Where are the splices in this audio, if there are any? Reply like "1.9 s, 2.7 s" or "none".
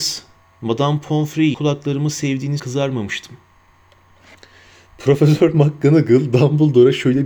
1.5 s, 2.6 s